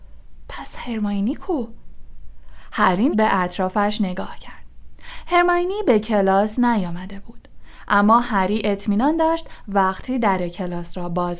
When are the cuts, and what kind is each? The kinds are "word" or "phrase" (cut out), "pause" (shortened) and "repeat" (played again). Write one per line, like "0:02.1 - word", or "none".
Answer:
0:03.1 - word